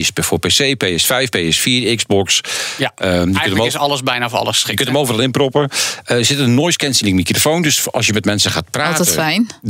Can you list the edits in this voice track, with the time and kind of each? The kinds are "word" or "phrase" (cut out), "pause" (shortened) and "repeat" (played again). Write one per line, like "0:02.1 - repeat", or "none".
none